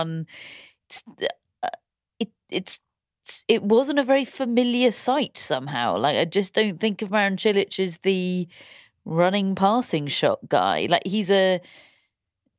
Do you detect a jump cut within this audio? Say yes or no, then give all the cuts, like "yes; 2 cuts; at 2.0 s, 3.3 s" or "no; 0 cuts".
no; 0 cuts